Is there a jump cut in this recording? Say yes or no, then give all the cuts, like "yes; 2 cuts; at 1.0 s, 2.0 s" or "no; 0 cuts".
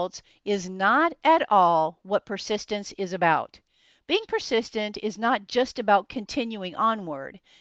no; 0 cuts